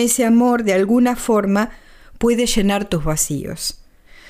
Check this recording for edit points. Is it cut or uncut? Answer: uncut